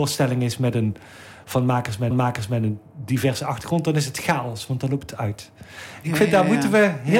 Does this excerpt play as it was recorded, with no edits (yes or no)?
no